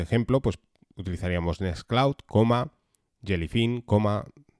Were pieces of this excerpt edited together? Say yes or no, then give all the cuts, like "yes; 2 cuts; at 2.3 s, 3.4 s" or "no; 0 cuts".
no; 0 cuts